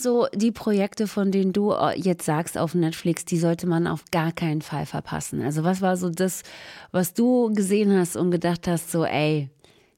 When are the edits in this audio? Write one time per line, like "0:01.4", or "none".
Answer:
none

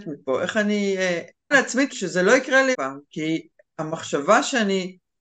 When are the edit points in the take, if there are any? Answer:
0:01.5
0:01.9
0:02.7

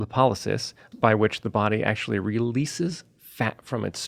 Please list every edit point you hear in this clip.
0:00.9

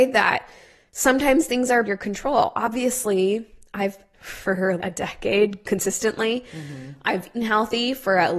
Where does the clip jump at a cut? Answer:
0:01.8
0:04.1
0:04.8
0:07.3

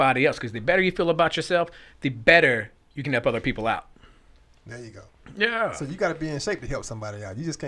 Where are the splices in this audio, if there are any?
none

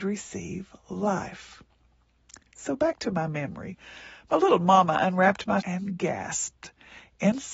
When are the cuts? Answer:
0:05.6

